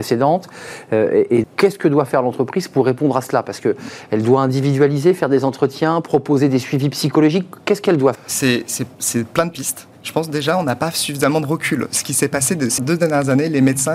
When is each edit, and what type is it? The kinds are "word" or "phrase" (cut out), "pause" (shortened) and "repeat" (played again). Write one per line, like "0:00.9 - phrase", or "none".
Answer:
0:01.4 - word
0:08.1 - word
0:09.9 - pause
0:12.8 - word